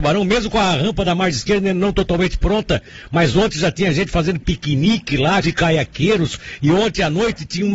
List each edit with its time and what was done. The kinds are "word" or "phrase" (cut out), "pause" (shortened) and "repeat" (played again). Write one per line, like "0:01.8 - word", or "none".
0:05.4 - word